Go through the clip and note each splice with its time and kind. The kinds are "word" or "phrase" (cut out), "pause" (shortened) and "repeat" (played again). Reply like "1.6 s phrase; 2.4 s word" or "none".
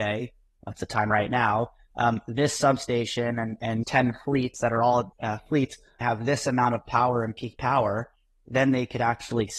3.8 s word; 5.1 s phrase; 6.0 s phrase